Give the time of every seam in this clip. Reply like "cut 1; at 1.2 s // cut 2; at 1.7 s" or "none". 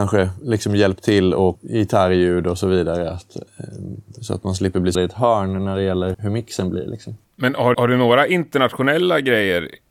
cut 1; at 1.5 s // cut 2; at 4.9 s // cut 3; at 6.1 s // cut 4; at 7.2 s // cut 5; at 7.7 s